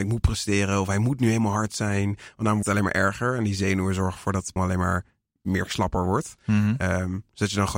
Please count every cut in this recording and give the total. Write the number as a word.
two